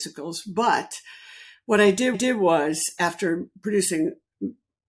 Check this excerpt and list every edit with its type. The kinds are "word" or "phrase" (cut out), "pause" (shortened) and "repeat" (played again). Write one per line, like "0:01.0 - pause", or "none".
0:02.1 - repeat